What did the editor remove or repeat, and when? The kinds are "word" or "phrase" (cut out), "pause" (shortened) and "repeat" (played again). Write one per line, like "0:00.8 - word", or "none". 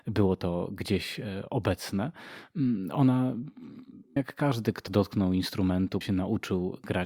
0:04.2 - word
0:04.9 - word
0:06.0 - word